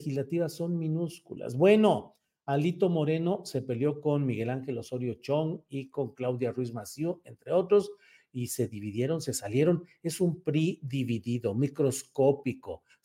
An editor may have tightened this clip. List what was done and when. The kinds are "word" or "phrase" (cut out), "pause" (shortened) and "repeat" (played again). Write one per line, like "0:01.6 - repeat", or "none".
none